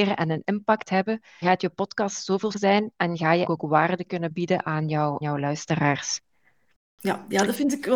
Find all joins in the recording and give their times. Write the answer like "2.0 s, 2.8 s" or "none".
1.4 s, 2.5 s, 3.4 s, 5.2 s